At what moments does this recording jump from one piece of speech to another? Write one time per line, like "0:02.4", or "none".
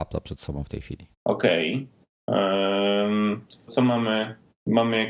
0:01.1
0:03.7